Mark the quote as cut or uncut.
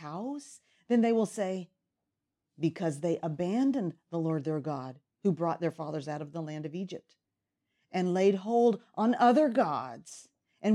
uncut